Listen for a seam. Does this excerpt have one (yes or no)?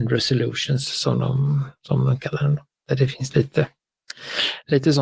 no